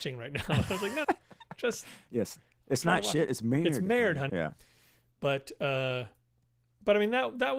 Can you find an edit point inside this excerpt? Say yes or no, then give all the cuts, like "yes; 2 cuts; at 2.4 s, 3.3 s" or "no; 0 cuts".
yes; 2 cuts; at 1.0 s, 4.3 s